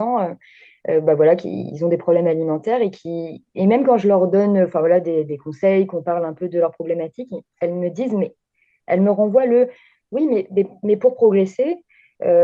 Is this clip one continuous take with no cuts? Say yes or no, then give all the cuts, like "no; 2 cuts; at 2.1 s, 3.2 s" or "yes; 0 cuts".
yes; 0 cuts